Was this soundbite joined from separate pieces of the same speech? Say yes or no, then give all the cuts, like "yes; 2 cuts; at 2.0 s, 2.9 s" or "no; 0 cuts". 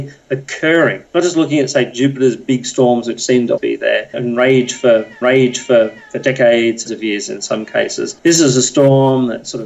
yes; 4 cuts; at 3.6 s, 4.1 s, 5.2 s, 6.9 s